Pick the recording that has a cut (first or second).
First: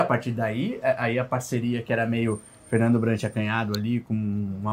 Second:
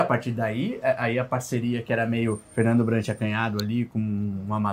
second